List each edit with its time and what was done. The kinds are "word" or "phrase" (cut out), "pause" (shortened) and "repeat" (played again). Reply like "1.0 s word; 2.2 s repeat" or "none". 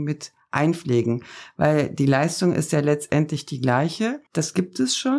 4.3 s pause